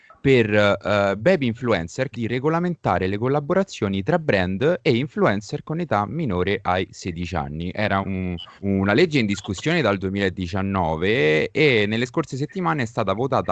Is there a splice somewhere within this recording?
yes; 3 cuts; at 2.1 s, 8.0 s, 8.6 s

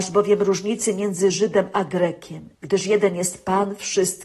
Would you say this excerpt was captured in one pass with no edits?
no; 1 cut; at 2.5 s

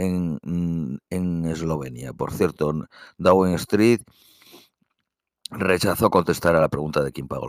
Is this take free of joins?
yes; 0 cuts

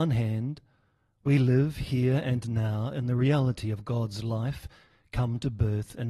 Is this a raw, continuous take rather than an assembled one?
yes; 0 cuts

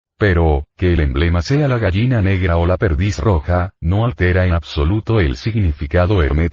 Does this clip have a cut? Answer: no; 0 cuts

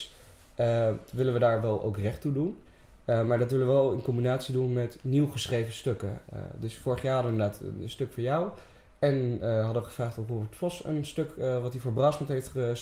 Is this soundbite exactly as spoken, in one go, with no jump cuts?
yes; 0 cuts

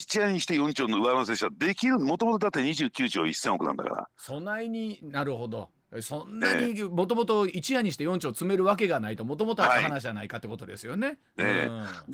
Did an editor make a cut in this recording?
no; 0 cuts

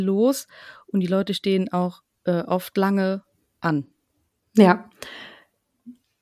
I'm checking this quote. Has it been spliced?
no; 0 cuts

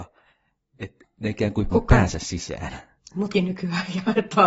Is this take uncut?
no; 2 cuts; at 1.7 s, 3.3 s

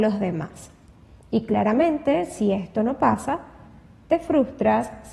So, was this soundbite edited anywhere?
no; 0 cuts

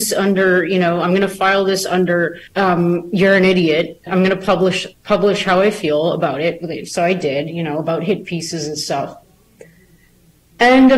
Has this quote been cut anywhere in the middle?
yes; 2 cuts; at 2.5 s, 4.1 s

